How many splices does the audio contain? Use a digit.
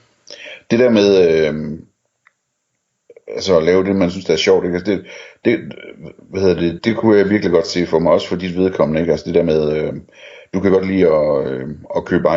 1